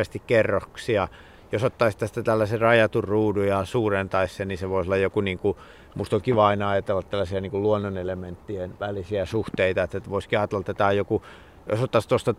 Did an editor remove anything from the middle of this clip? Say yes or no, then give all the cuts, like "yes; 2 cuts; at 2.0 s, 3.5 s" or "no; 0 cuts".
no; 0 cuts